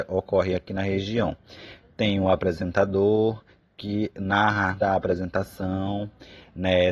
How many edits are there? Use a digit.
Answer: 1